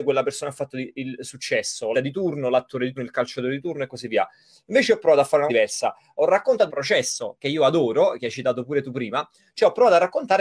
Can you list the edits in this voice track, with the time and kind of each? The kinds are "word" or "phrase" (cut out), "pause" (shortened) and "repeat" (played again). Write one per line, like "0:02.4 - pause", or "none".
0:01.9 - word
0:03.0 - word
0:05.5 - word
0:06.7 - word
0:07.4 - word

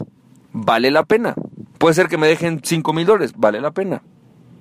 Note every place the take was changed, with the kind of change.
0:01.7 - pause

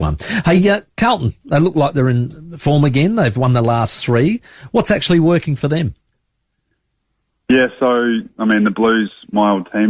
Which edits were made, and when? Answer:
none

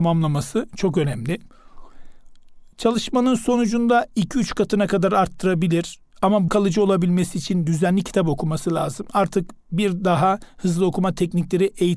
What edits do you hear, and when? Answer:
0:06.5 - word

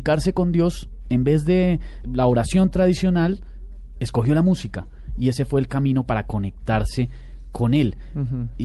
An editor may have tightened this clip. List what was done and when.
0:02.0 - word

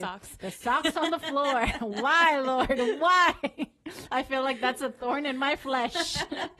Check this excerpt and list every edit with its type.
none

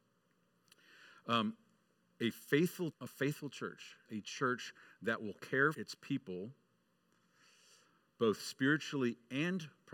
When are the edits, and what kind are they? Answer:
0:02.9 - word
0:04.1 - word
0:05.7 - word

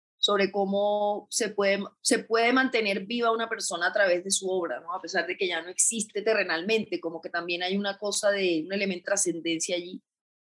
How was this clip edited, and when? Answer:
0:09.0 - word

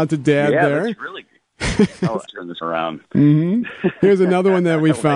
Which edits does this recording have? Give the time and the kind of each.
0:02.2 - word
0:02.6 - word

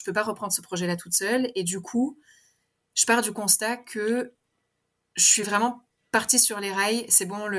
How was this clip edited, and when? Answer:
none

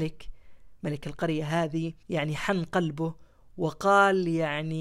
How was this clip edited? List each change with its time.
0:02.0 - pause

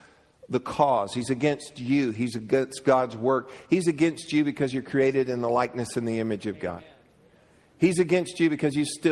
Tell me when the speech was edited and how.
none

